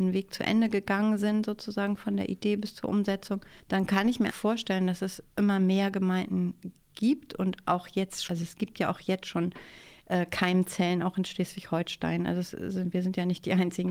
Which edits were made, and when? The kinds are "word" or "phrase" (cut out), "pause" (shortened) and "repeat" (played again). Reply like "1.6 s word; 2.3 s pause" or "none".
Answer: 3.6 s pause; 4.3 s word; 5.3 s pause; 8.3 s word

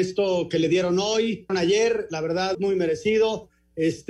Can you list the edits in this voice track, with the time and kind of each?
1.5 s phrase; 2.5 s word

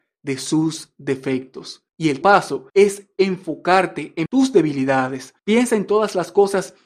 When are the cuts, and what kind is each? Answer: 1.9 s pause; 2.2 s word; 2.7 s pause; 4.3 s word; 5.4 s pause

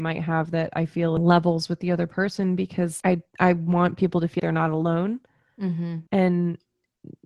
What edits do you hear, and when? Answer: 3.0 s word; 4.4 s word; 6.1 s pause

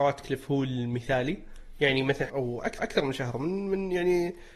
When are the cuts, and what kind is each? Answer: 2.3 s phrase; 2.8 s repeat

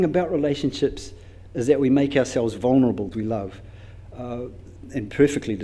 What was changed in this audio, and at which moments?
3.1 s phrase

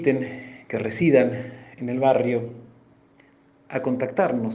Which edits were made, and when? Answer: none

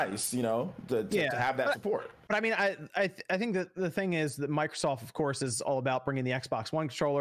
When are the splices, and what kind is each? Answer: none

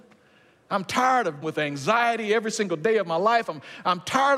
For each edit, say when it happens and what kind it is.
1.4 s word

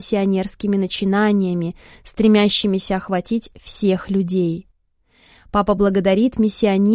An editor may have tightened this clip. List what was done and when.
none

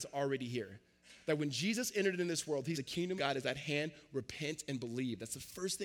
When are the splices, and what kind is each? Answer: 2.7 s word; 3.2 s word

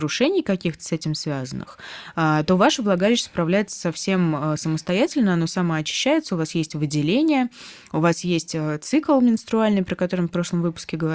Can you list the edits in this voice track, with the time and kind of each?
none

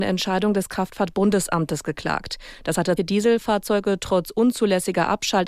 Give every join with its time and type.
3.0 s word

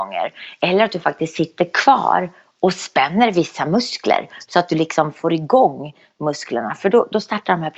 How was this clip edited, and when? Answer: none

